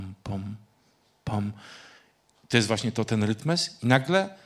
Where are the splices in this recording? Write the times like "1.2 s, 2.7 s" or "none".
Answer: none